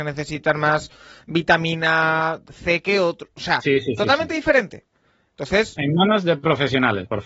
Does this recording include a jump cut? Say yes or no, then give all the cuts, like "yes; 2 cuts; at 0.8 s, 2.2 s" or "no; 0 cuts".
no; 0 cuts